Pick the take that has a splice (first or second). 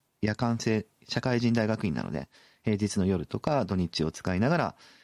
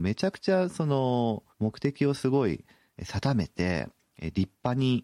second